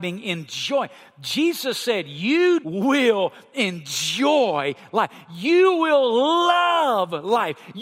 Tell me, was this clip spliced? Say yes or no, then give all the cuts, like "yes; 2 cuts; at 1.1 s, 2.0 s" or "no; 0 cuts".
yes; 1 cut; at 2.6 s